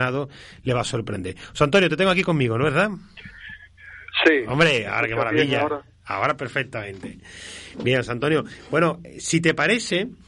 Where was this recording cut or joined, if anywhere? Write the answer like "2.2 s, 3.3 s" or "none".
none